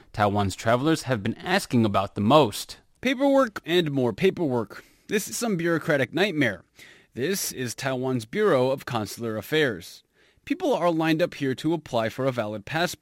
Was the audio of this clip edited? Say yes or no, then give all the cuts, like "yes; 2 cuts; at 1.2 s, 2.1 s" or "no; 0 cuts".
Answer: yes; 2 cuts; at 3.6 s, 5.3 s